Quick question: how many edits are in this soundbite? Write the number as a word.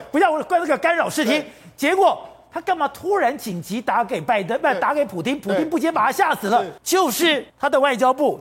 two